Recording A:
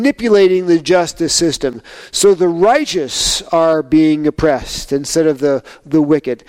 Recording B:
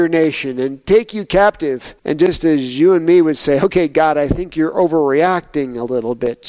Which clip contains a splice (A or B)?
B